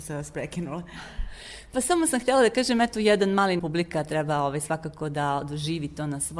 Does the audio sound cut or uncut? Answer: cut